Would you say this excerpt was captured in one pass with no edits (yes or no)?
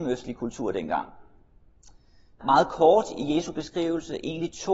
no